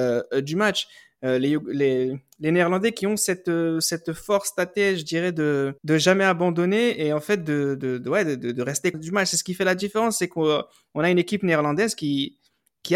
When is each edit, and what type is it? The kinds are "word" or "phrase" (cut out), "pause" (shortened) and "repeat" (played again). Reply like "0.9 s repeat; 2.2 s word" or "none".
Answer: 5.8 s pause; 8.9 s phrase